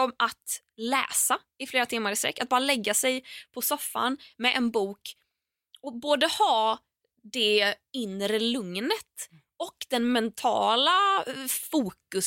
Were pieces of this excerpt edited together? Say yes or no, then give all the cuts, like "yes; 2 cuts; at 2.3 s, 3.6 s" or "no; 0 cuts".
no; 0 cuts